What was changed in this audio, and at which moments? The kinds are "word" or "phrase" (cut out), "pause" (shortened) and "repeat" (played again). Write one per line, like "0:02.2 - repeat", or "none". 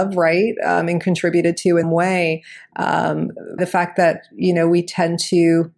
0:01.8 - word
0:03.6 - word